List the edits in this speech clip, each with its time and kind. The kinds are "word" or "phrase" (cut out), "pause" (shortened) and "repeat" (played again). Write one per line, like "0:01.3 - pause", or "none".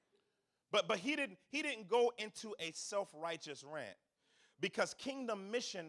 none